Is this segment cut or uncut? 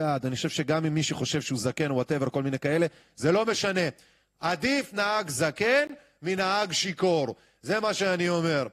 uncut